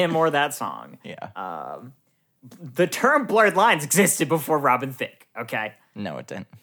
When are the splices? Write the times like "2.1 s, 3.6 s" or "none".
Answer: none